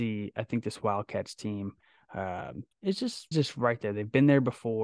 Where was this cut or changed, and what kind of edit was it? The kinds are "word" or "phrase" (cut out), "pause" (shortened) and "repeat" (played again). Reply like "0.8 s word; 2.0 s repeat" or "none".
2.7 s pause; 3.3 s word